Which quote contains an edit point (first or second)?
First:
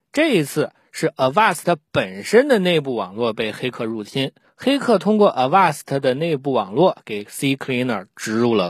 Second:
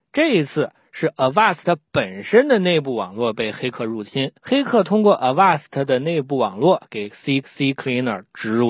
second